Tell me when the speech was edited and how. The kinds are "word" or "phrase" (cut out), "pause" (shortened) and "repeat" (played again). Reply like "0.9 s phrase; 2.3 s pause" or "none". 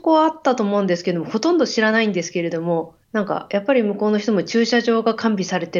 3.0 s pause